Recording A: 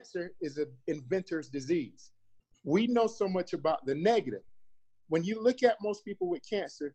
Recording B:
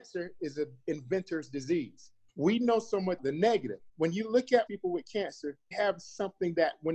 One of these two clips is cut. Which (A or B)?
B